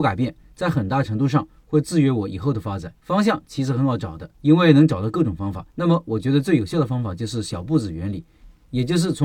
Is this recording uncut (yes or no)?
no